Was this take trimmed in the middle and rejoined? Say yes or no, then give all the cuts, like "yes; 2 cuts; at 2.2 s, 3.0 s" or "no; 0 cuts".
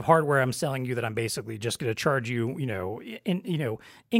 no; 0 cuts